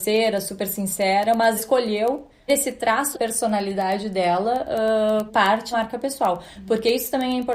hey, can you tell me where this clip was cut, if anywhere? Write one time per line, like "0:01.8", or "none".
0:01.6
0:02.5
0:03.1
0:05.3
0:05.7